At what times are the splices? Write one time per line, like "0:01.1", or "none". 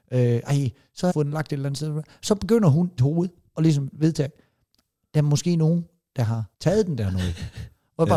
0:01.1
0:03.0
0:06.5